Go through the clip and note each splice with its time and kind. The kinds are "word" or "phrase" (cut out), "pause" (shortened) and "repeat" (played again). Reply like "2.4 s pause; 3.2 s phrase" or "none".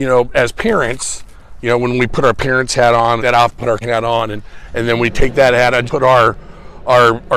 3.2 s phrase; 3.8 s word; 5.9 s word